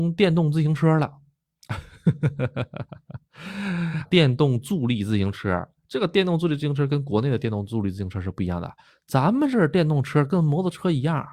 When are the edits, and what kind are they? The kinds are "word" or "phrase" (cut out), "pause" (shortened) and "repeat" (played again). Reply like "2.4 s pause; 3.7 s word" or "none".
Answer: 4.1 s word